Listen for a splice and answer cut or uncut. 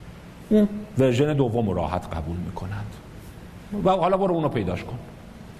uncut